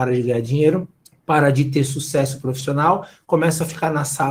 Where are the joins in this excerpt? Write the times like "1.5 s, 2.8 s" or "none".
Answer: 1.1 s